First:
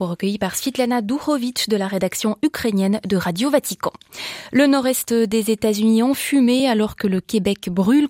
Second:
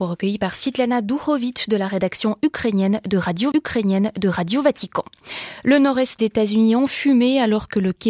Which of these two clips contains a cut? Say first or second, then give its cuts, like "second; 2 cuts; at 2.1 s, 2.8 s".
second; 2 cuts; at 3.5 s, 6.2 s